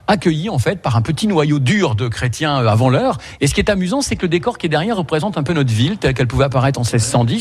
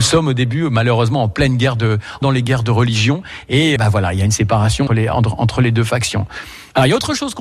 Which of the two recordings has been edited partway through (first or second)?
second